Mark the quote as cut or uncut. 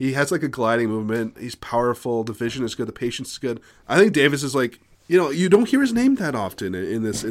cut